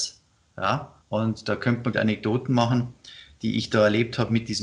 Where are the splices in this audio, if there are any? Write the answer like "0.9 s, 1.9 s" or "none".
1.0 s, 1.9 s